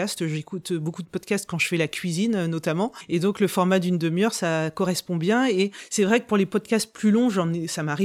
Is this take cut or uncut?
uncut